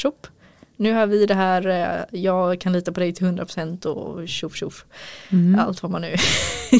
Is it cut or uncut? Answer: uncut